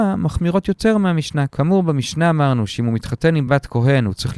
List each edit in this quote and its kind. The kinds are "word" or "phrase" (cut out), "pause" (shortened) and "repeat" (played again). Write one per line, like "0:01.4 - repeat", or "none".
none

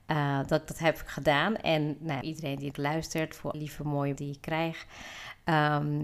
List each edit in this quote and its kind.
0:02.2 - phrase
0:02.7 - word
0:03.5 - word
0:04.2 - word

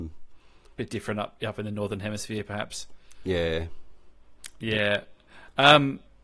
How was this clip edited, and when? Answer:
none

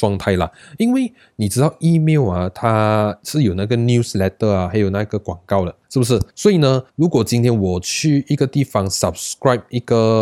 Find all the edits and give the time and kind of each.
0:05.8 - pause
0:06.3 - pause
0:06.9 - pause

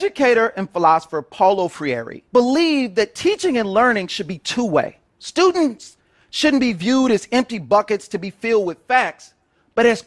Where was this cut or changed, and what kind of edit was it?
0:02.3 - pause
0:05.1 - pause

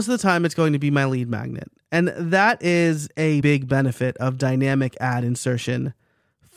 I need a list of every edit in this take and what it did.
0:03.4 - word

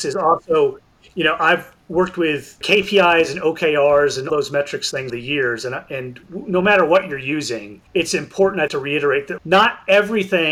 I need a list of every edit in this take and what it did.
0:04.3 - word
0:05.1 - word
0:07.9 - pause
0:08.7 - word
0:09.4 - word

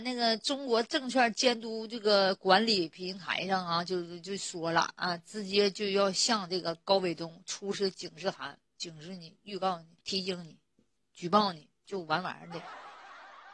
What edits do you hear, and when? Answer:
0:08.7 - word
0:10.0 - pause
0:10.7 - pause

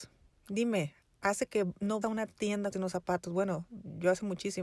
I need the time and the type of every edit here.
0:01.5 - word
0:02.0 - word
0:02.7 - word

